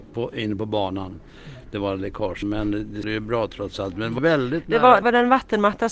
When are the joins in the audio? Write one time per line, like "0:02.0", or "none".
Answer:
0:02.4
0:03.0
0:04.2
0:05.0